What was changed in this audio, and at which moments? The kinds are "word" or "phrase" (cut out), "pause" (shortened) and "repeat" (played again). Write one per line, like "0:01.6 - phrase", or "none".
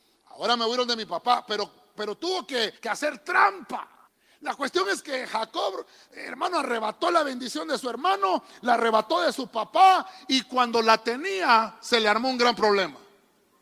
0:02.8 - pause
0:04.0 - pause